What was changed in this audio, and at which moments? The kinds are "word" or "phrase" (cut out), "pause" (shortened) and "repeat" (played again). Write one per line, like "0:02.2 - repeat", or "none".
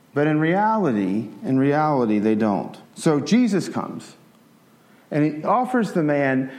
0:02.9 - pause
0:05.4 - word

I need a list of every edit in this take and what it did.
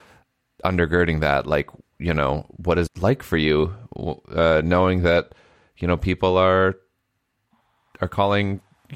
0:02.9 - word

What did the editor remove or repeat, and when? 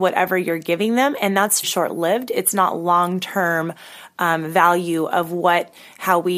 0:01.6 - word

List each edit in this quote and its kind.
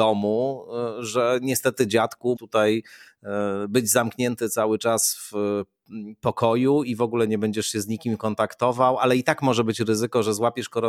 0:02.4 - word

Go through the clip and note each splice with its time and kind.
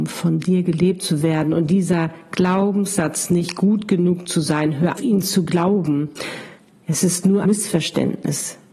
0:05.0 - word
0:07.4 - word

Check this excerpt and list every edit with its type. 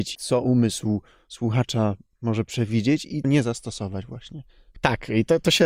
0:03.2 - word

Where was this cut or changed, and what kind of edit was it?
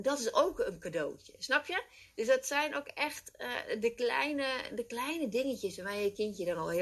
none

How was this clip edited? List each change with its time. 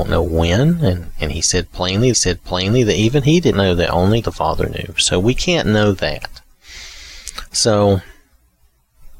0:02.1 - repeat
0:03.5 - word
0:04.2 - word

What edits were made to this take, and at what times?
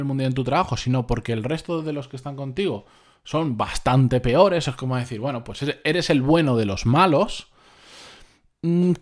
none

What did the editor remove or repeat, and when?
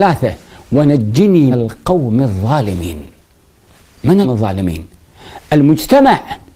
0:01.5 - word
0:04.2 - word

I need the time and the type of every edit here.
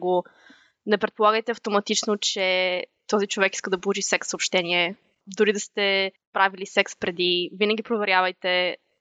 none

